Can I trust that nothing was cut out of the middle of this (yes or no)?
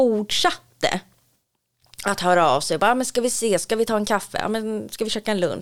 yes